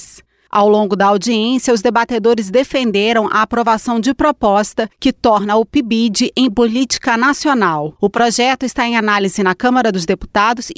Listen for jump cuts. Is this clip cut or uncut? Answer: cut